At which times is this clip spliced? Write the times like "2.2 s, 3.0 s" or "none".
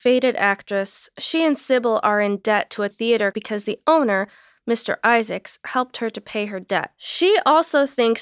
2.9 s, 3.3 s